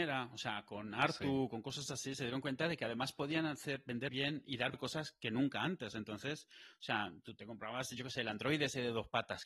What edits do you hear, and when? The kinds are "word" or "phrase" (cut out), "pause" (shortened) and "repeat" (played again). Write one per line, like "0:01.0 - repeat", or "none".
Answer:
0:04.1 - word
0:04.7 - word